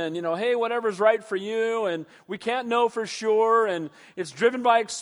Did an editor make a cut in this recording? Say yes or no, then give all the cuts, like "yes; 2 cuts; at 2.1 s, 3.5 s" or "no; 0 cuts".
no; 0 cuts